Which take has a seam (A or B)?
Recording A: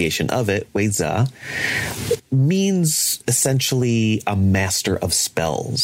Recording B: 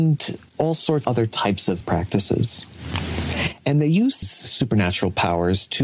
B